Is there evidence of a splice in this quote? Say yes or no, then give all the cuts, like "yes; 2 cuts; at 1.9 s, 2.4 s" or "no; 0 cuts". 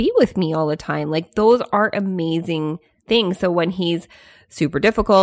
no; 0 cuts